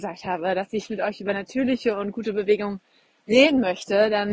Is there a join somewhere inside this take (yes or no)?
no